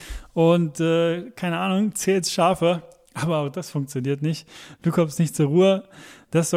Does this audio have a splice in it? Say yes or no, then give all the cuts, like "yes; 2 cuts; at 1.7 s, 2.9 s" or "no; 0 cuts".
no; 0 cuts